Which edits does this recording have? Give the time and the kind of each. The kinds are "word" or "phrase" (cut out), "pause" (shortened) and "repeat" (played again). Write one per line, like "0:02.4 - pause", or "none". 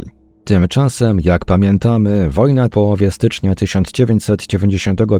0:02.7 - phrase